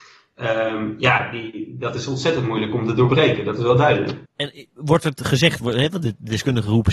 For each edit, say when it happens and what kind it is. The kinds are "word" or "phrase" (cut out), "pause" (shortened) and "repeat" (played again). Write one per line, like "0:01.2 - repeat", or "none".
0:04.3 - pause

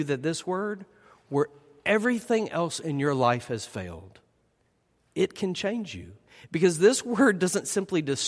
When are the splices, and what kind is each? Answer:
none

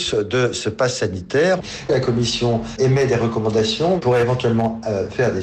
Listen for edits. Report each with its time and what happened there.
none

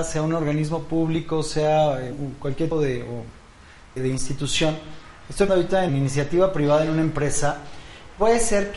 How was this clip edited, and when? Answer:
0:02.1 - word
0:02.7 - word
0:04.0 - word
0:05.5 - word
0:05.9 - phrase

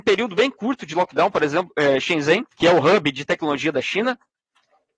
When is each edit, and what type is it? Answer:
0:02.5 - pause

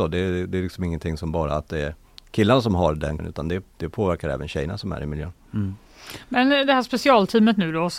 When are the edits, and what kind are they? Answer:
0:03.2 - word

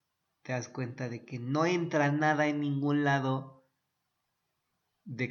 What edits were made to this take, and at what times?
none

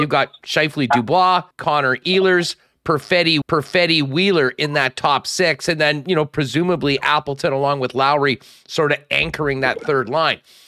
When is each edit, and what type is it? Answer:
0:01.5 - pause
0:03.4 - repeat

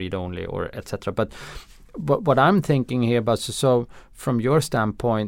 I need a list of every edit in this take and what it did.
none

